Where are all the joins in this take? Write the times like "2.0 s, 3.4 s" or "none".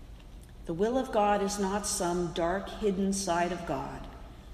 none

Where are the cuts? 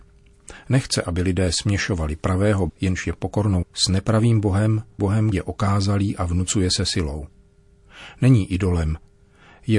2.7 s, 3.6 s, 5.0 s, 5.3 s

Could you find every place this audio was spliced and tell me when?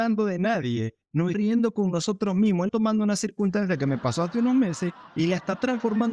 1.3 s, 2.7 s

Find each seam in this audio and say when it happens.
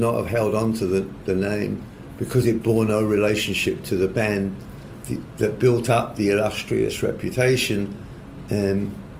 none

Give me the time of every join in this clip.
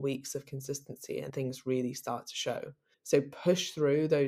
1.3 s, 2.9 s

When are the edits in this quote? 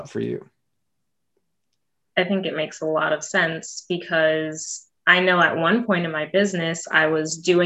5.0 s

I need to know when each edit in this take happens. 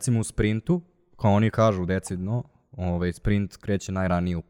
none

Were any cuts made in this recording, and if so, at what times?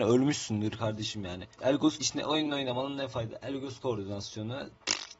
1.5 s, 2.0 s

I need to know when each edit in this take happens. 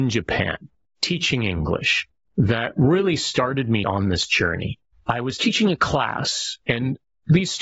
none

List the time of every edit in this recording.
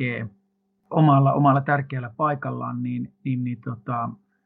none

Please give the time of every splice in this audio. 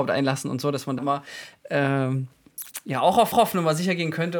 1.0 s, 3.3 s

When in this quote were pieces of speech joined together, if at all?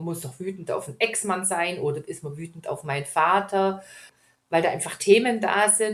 none

